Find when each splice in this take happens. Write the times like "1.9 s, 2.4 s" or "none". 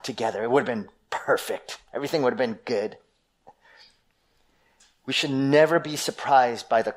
none